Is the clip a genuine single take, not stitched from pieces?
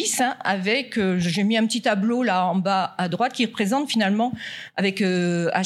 yes; 0 cuts

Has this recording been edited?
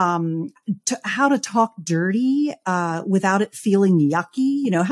no; 0 cuts

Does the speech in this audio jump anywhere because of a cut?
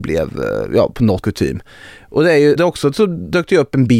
yes; 2 cuts; at 1.2 s, 2.6 s

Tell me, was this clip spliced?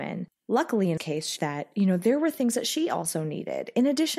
yes; 2 cuts; at 1.0 s, 1.4 s

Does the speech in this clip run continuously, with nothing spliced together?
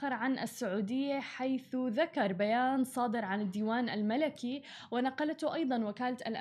yes; 0 cuts

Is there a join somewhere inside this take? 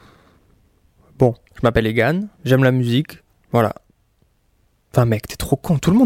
yes; 3 cuts; at 1.4 s, 2.3 s, 3.3 s

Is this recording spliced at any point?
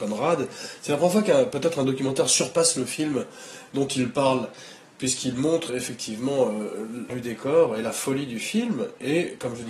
yes; 2 cuts; at 5.7 s, 7.1 s

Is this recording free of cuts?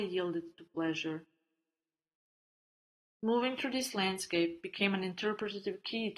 yes; 0 cuts

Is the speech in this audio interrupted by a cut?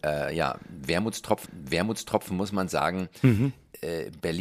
yes; 1 cut; at 1.5 s

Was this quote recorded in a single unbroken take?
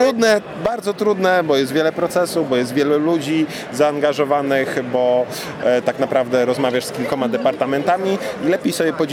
yes; 0 cuts

